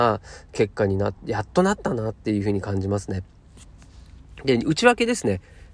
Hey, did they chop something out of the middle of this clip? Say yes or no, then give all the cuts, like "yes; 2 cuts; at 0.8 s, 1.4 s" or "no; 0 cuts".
yes; 1 cut; at 1.2 s